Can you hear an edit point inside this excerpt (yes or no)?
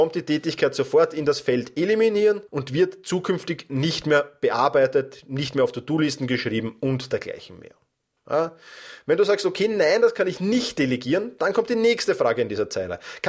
yes